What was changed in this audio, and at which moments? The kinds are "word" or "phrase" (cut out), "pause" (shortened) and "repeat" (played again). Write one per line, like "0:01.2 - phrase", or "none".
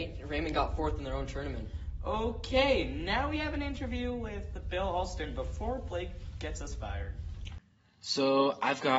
none